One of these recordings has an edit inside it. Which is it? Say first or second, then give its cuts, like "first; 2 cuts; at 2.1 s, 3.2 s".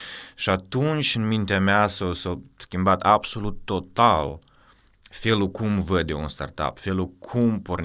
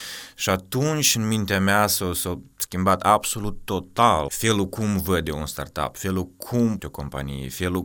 second; 2 cuts; at 4.3 s, 6.8 s